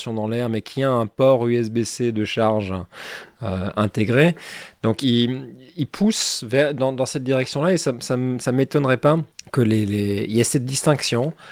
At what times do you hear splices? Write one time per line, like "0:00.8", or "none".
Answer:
0:05.0
0:09.3